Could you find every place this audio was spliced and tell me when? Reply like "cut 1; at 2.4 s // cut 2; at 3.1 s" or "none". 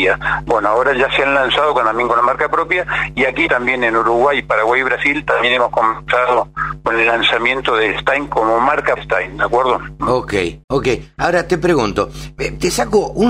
cut 1; at 3.5 s // cut 2; at 9.0 s // cut 3; at 10.6 s